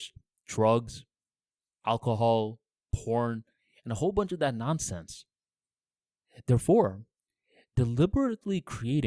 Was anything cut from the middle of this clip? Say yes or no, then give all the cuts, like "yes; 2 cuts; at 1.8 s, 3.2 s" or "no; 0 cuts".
no; 0 cuts